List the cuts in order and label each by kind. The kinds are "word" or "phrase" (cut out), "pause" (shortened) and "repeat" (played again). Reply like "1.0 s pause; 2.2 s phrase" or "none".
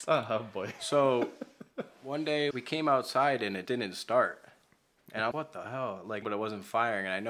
2.5 s word; 3.7 s word; 5.3 s word; 6.2 s phrase